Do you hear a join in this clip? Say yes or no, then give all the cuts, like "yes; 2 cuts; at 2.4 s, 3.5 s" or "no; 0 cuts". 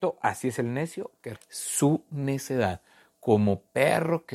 yes; 1 cut; at 1.4 s